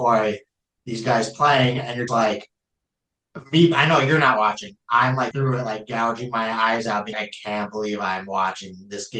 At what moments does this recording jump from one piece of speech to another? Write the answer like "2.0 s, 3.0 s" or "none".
2.1 s, 5.3 s, 7.1 s